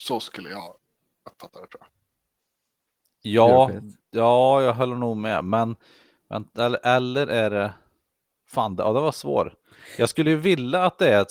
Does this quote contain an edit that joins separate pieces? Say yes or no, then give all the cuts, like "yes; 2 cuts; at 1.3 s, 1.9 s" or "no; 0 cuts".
yes; 1 cut; at 4.0 s